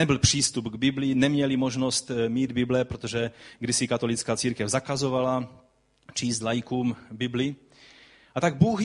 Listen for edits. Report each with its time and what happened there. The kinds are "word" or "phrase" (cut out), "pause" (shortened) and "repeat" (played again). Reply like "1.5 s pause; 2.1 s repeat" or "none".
none